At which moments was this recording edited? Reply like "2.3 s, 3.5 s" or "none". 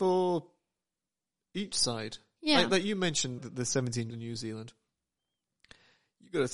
3.4 s, 4.1 s

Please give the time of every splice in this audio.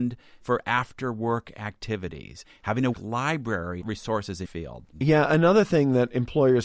2.9 s, 3.8 s, 4.4 s

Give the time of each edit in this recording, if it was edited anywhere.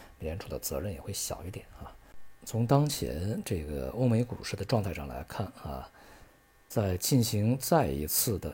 none

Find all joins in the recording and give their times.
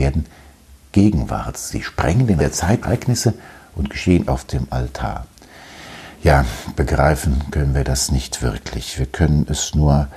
2.4 s, 2.8 s, 4.3 s

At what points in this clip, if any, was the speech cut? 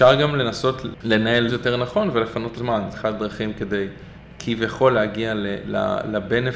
1.5 s, 2.5 s, 2.9 s

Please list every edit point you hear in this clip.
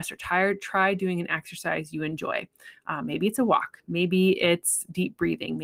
none

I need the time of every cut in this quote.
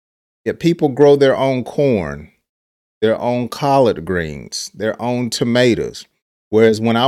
none

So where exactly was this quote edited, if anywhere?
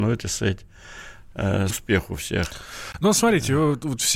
1.7 s

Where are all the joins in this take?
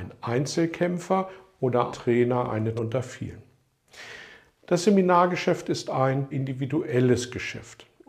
1.9 s, 2.8 s, 6.3 s

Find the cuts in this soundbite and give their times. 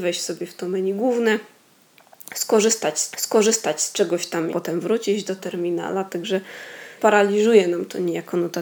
3.1 s, 4.5 s, 5.4 s, 7.0 s

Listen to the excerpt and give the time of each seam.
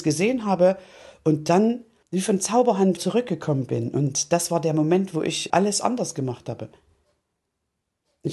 2.0 s, 3.0 s, 5.5 s

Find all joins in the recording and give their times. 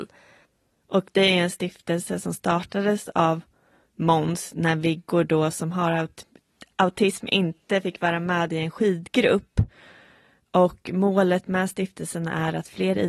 none

